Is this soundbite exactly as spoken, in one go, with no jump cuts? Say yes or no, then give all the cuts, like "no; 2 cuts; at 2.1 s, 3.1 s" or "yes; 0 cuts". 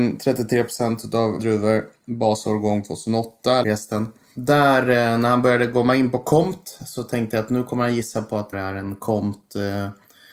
no; 3 cuts; at 1.4 s, 3.6 s, 8.5 s